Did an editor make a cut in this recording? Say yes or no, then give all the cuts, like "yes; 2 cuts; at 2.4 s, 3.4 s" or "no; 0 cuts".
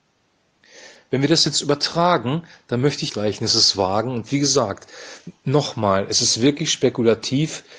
yes; 1 cut; at 3.1 s